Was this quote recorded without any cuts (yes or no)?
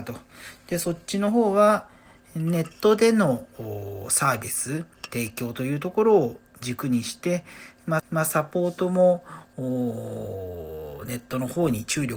no